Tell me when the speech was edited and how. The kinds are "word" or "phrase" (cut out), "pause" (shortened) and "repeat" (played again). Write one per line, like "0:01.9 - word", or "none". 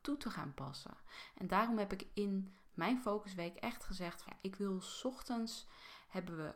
0:04.3 - word